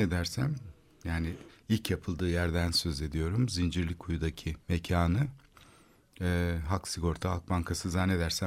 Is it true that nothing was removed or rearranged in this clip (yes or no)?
no